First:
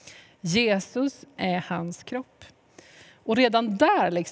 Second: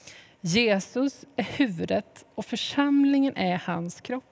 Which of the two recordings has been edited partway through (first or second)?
first